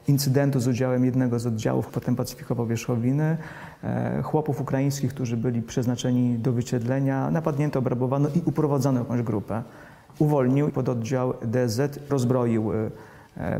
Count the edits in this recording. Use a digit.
3